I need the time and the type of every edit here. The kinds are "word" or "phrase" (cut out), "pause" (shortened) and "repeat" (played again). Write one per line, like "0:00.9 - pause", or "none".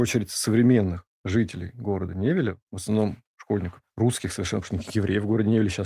none